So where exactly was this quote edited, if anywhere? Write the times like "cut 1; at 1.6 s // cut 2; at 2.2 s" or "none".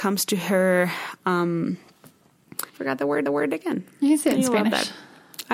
cut 1; at 2.7 s // cut 2; at 3.3 s